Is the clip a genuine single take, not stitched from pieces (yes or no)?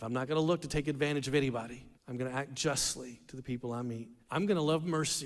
no